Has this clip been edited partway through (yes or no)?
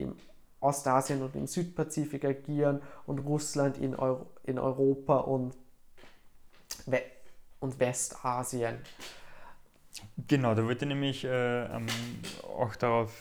no